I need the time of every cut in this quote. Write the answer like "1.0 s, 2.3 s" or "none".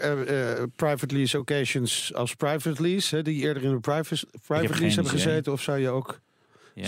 none